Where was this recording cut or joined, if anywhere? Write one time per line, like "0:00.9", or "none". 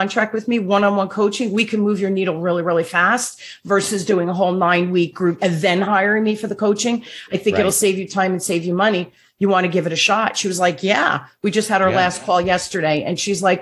0:05.4